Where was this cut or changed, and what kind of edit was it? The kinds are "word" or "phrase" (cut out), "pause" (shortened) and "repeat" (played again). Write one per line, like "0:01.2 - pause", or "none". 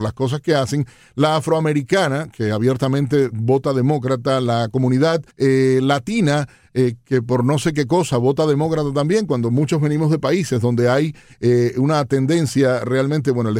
0:05.3 - pause